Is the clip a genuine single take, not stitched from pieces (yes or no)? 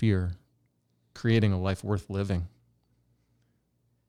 yes